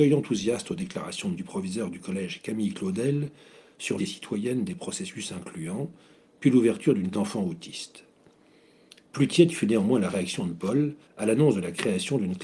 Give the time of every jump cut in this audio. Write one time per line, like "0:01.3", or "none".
0:01.4
0:04.0
0:07.1
0:11.0